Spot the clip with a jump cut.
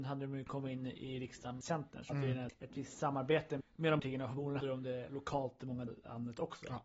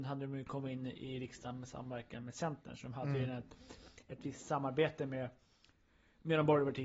first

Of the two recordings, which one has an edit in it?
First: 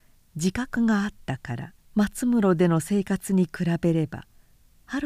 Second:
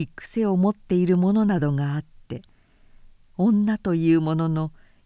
first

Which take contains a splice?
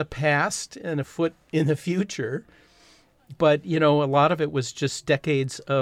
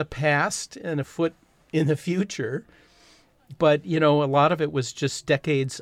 first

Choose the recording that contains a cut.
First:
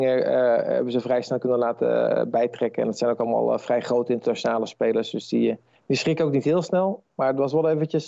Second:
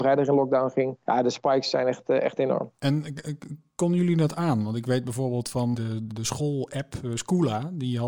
second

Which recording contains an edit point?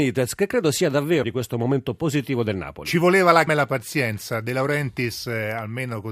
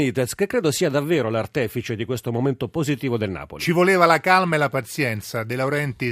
first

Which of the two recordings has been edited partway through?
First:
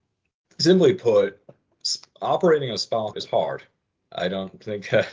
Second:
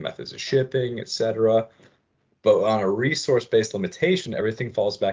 first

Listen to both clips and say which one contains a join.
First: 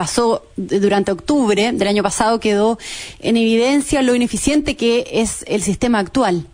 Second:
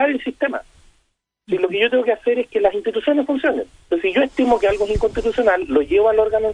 second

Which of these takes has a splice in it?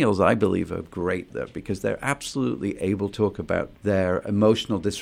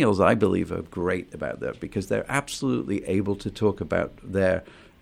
first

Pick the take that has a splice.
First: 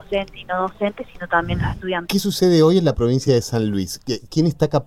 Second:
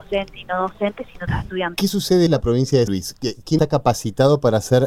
second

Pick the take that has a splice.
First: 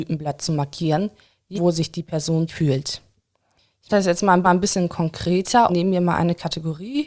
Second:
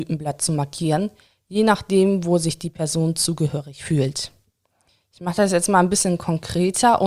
first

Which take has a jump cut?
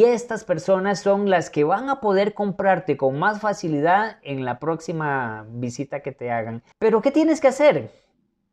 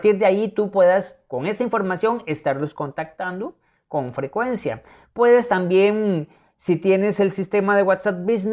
first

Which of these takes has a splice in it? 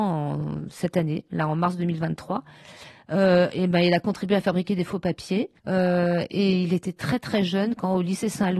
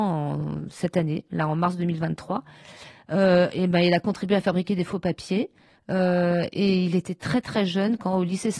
first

